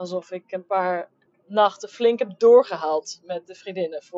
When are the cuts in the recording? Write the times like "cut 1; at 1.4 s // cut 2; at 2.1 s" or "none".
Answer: cut 1; at 1.2 s